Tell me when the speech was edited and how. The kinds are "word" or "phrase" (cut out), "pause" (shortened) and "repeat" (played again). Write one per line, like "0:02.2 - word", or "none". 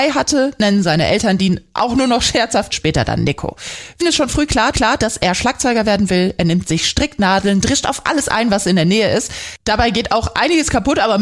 0:02.7 - phrase
0:04.0 - word
0:04.7 - repeat